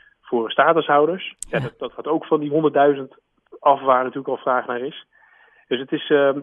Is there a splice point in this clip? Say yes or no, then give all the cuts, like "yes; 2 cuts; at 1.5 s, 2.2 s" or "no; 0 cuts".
no; 0 cuts